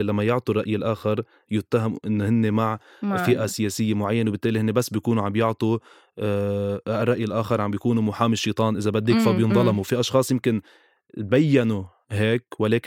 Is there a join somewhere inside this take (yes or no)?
no